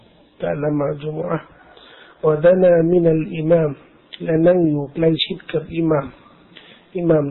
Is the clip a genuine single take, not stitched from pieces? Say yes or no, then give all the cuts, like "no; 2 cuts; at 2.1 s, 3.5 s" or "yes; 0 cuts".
yes; 0 cuts